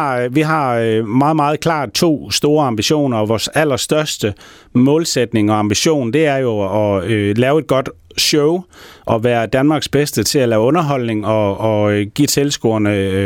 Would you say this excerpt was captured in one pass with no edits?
yes; 0 cuts

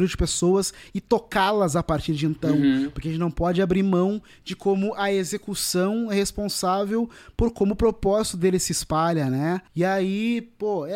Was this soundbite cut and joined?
no; 0 cuts

